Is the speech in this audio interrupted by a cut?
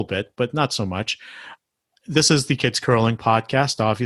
yes; 1 cut; at 2.6 s

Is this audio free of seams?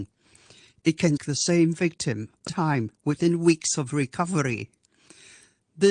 no; 2 cuts; at 1.2 s, 2.5 s

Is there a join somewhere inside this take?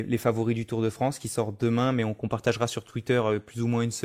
no; 0 cuts

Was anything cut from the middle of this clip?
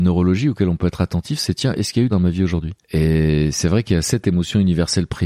yes; 2 cuts; at 2.1 s, 2.8 s

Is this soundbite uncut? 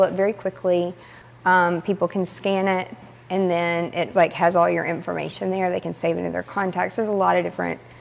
yes; 0 cuts

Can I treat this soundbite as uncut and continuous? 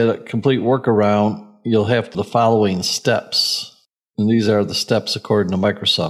no; 1 cut; at 2.1 s

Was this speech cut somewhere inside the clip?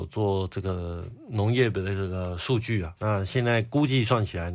yes; 1 cut; at 3.0 s

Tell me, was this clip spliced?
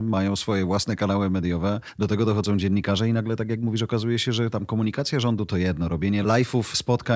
no; 0 cuts

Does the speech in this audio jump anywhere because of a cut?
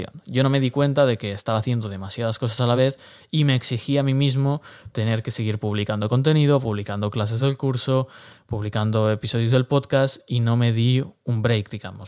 no; 0 cuts

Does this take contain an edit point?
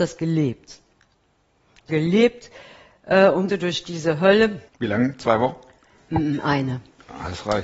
yes; 3 cuts; at 1.9 s, 3.5 s, 4.7 s

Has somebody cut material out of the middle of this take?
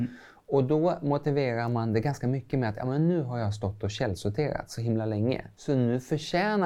yes; 1 cut; at 5.5 s

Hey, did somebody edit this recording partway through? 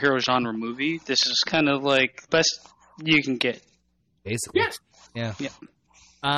yes; 1 cut; at 2.3 s

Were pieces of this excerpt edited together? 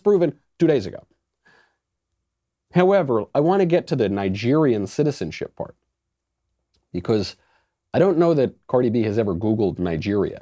no; 0 cuts

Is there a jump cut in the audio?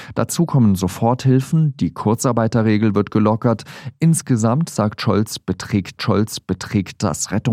yes; 1 cut; at 6.0 s

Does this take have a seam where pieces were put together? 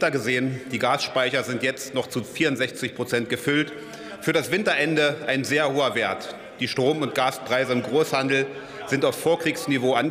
no; 0 cuts

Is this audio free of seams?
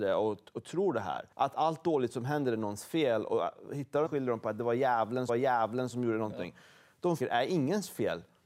no; 4 cuts; at 1.3 s, 4.1 s, 5.3 s, 7.2 s

